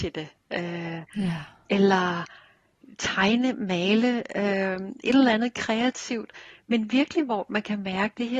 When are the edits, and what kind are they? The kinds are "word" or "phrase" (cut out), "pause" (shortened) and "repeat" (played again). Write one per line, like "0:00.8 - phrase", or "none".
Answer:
none